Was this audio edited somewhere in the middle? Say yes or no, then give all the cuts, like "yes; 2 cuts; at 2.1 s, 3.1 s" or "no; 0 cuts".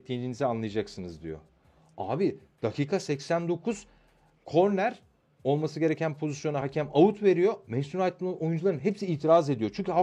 no; 0 cuts